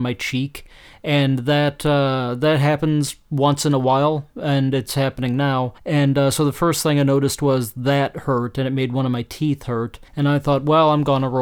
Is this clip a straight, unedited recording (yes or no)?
no